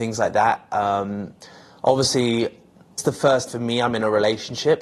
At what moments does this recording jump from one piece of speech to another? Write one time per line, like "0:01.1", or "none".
0:03.0
0:03.5